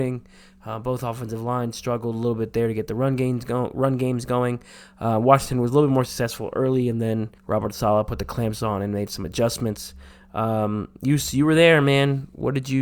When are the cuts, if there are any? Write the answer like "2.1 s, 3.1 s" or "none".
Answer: 7.4 s